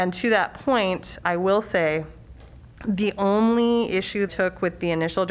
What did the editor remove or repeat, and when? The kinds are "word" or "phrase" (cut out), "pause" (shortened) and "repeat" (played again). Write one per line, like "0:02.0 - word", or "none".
0:01.2 - word
0:04.3 - phrase